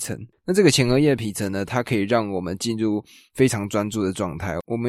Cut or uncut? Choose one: uncut